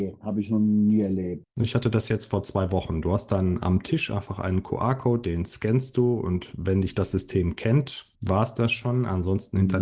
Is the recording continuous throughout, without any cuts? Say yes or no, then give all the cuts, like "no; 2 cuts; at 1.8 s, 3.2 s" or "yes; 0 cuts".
no; 1 cut; at 1.5 s